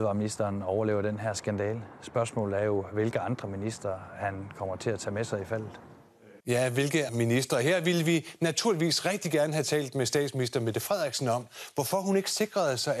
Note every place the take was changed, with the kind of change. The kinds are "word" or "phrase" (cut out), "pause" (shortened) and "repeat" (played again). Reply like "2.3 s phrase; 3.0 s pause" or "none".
6.4 s pause; 7.1 s word